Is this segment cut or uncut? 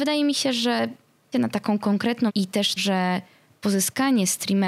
cut